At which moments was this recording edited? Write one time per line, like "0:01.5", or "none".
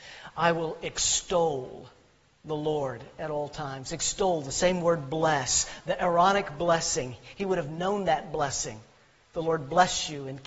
none